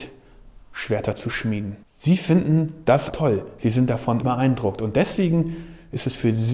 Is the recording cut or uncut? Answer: cut